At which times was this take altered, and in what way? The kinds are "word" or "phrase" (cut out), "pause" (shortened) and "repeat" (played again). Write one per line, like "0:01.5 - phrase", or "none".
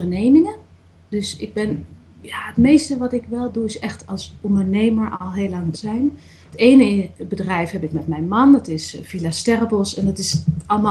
0:05.7 - word